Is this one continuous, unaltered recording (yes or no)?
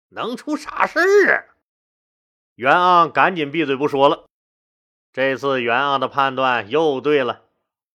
yes